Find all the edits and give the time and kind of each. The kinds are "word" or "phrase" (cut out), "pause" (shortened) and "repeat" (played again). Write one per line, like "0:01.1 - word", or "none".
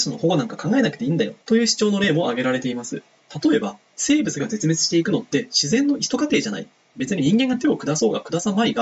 0:01.4 - pause